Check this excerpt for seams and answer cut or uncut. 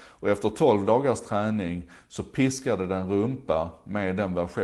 uncut